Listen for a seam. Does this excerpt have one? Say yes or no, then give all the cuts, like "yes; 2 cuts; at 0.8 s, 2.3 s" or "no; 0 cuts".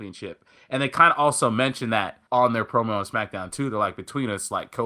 yes; 1 cut; at 2.3 s